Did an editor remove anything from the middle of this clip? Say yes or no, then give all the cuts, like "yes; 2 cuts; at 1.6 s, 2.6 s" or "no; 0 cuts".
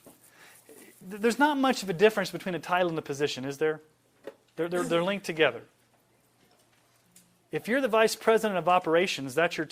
no; 0 cuts